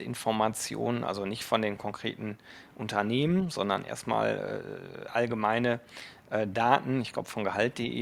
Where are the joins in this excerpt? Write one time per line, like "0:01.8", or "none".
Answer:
none

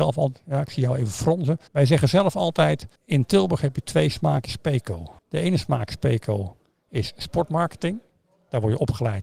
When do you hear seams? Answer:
0:01.7
0:03.0
0:05.2

